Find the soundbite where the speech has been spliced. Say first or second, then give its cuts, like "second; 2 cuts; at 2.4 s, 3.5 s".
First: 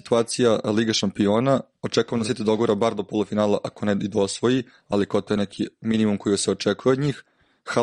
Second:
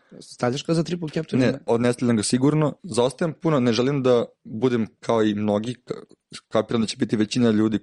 second; 2 cuts; at 2.8 s, 4.3 s